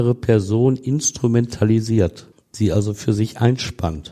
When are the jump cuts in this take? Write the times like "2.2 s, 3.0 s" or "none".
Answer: 2.3 s